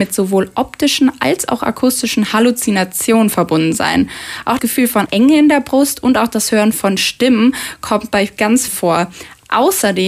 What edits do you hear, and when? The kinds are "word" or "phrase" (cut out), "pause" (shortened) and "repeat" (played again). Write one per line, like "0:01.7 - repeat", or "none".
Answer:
0:04.6 - word
0:05.1 - word
0:08.7 - word